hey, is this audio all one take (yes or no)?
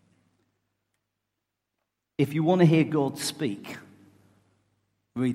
yes